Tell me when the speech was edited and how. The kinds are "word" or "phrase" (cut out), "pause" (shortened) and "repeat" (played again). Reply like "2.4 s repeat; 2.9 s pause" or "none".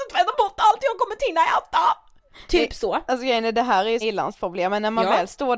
4.0 s phrase